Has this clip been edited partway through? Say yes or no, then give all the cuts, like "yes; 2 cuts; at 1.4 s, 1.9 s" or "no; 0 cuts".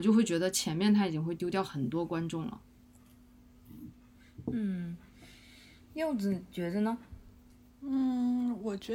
no; 0 cuts